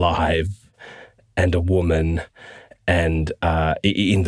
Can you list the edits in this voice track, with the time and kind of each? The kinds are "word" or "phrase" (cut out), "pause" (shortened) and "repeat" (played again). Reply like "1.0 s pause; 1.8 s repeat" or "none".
none